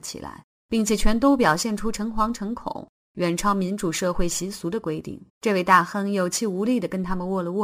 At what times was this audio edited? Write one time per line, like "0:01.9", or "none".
0:05.3